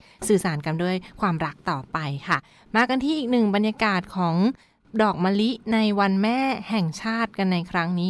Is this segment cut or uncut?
uncut